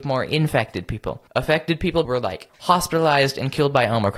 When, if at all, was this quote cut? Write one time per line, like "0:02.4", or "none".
0:01.3
0:02.0
0:02.5